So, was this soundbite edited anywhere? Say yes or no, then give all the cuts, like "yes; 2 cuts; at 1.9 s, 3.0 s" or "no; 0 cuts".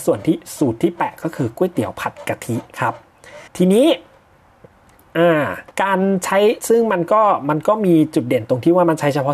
yes; 2 cuts; at 3.5 s, 5.7 s